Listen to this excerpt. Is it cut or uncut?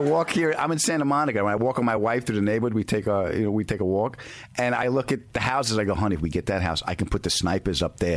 uncut